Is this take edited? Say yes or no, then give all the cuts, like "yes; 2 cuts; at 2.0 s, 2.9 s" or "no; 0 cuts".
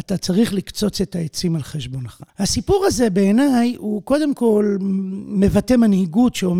yes; 1 cut; at 2.3 s